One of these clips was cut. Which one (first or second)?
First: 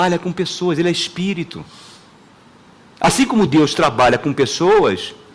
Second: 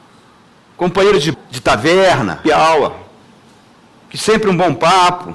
second